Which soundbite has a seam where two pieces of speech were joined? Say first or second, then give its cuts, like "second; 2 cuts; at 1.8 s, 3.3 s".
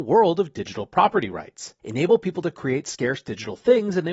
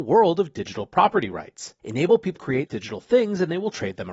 second; 2 cuts; at 2.4 s, 2.7 s